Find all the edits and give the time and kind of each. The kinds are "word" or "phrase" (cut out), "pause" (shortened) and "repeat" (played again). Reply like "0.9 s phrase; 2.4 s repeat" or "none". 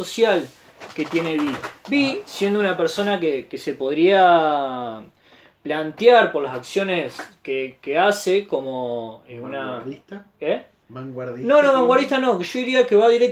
none

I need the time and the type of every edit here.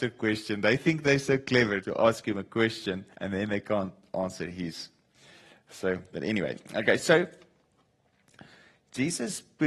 1.8 s word; 3.1 s pause

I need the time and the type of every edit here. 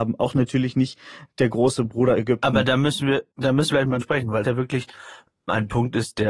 3.7 s word; 4.0 s word; 4.4 s word

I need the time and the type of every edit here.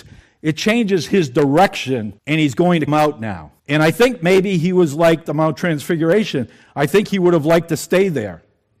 2.2 s pause; 2.9 s word; 3.6 s pause; 5.3 s phrase

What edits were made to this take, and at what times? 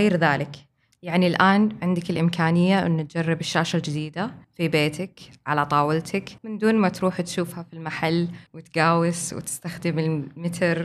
4.4 s pause; 6.4 s pause; 8.5 s pause

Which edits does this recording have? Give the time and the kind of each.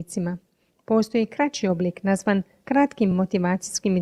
none

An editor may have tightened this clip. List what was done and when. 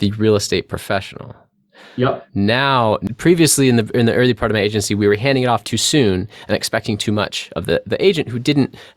none

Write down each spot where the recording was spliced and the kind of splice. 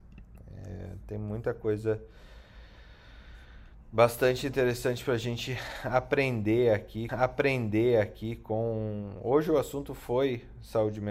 7.1 s repeat

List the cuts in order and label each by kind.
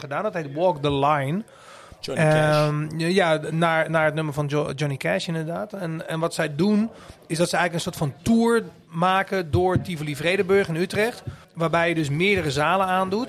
11.4 s pause

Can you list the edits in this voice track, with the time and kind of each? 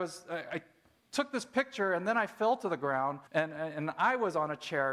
3.3 s pause

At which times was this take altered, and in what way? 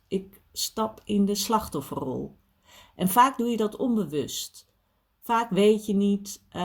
none

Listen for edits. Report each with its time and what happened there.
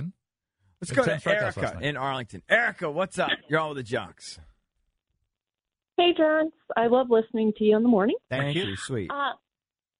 3.4 s pause

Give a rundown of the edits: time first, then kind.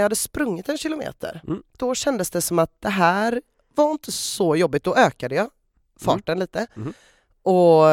none

